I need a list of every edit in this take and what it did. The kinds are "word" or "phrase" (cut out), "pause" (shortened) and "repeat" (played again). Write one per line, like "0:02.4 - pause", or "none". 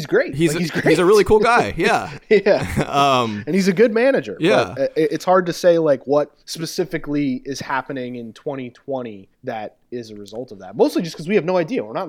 0:06.4 - pause
0:09.3 - pause